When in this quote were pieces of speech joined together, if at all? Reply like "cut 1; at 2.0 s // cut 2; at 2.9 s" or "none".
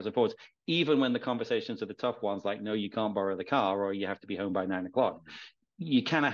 none